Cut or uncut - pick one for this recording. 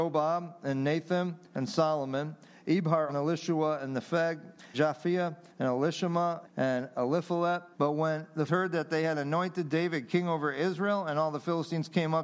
cut